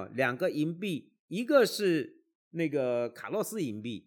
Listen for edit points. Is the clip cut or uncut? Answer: uncut